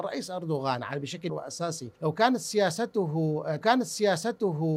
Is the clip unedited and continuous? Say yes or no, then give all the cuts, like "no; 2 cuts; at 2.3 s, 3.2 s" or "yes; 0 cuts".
no; 3 cuts; at 1.3 s, 2.0 s, 3.6 s